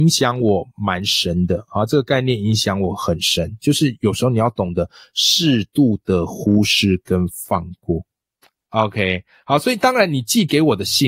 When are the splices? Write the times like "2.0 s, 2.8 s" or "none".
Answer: none